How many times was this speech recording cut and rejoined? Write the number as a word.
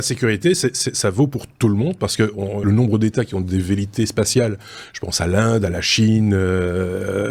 one